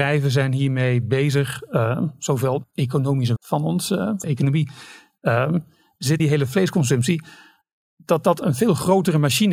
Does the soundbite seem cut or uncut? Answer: cut